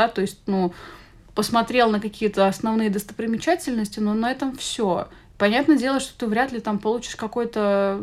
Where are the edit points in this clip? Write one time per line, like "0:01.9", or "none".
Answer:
none